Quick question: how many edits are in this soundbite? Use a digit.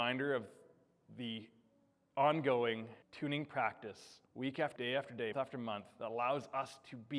4